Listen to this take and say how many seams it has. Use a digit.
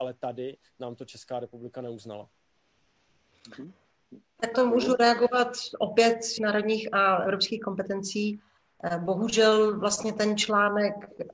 2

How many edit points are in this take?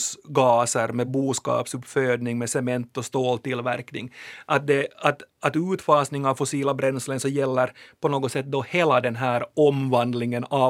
0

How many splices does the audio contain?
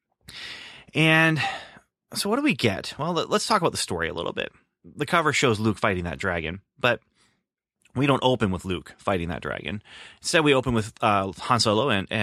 0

